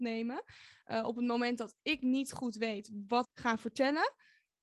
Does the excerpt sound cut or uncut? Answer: cut